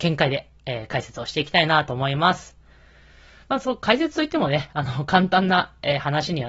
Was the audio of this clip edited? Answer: no; 0 cuts

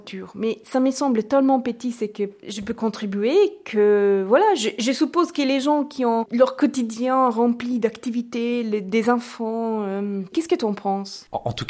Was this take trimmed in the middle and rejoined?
no; 0 cuts

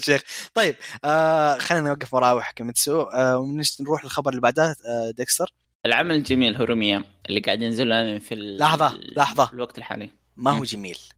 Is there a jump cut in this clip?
no; 0 cuts

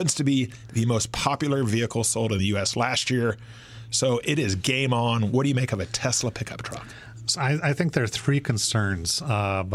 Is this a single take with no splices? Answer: yes; 0 cuts

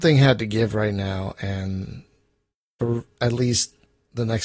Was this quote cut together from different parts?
no; 0 cuts

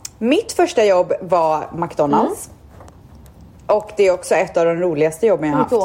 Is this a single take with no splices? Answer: yes; 0 cuts

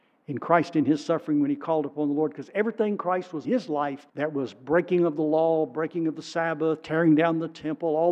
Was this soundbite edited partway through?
yes; 2 cuts; at 3.4 s, 4.1 s

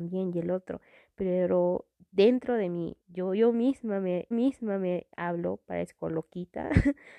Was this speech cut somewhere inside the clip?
yes; 3 cuts; at 1.9 s, 3.0 s, 4.3 s

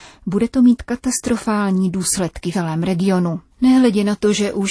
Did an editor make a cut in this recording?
yes; 2 cuts; at 2.5 s, 3.5 s

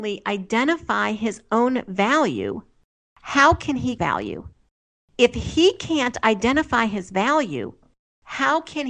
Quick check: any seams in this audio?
yes; 1 cut; at 4.0 s

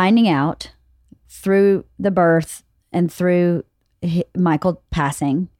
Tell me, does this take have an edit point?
no; 0 cuts

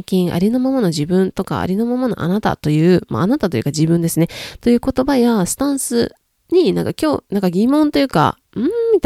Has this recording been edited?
no; 0 cuts

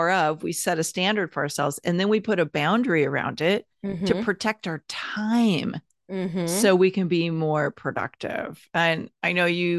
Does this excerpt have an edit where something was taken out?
no; 0 cuts

